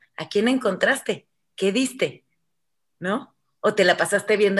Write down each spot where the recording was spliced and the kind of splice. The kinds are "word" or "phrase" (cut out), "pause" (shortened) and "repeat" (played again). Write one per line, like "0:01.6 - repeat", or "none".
none

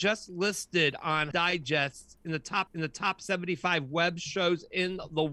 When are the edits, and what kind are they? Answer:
0:01.3 - word
0:02.7 - repeat

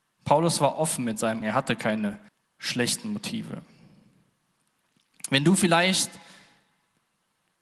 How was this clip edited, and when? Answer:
0:01.4 - word
0:02.3 - pause

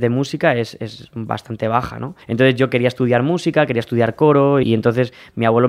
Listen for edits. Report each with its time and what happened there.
0:02.2 - pause
0:04.6 - word

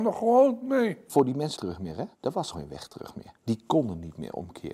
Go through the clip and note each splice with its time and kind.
0:01.6 - phrase
0:02.1 - pause
0:02.5 - word
0:03.4 - pause

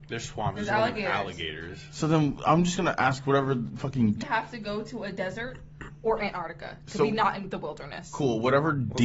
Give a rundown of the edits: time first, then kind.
0:04.2 - phrase

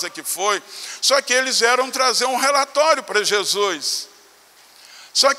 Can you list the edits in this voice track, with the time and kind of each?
none

